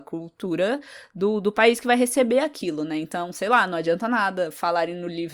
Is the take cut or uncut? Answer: uncut